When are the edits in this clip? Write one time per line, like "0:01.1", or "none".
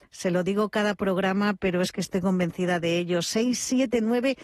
none